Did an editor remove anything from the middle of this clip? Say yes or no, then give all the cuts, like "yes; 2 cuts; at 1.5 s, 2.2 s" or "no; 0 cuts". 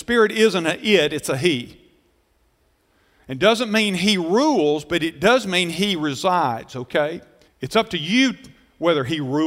yes; 1 cut; at 7.5 s